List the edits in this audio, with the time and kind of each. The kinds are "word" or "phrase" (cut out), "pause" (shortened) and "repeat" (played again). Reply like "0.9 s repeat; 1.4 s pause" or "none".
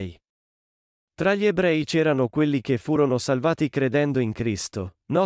none